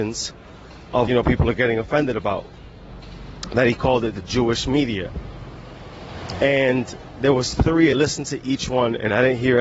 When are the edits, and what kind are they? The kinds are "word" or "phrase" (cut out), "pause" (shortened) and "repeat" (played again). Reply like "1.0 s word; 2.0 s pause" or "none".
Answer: 1.1 s phrase; 7.9 s phrase